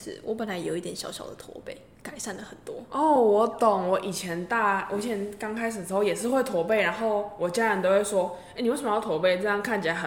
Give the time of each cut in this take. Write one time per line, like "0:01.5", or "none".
none